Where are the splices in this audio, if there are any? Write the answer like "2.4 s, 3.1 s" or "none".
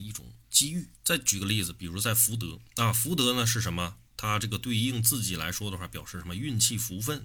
0.9 s, 2.7 s, 4.1 s